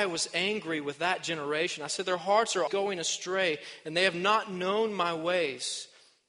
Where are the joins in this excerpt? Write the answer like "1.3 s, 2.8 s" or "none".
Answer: 2.7 s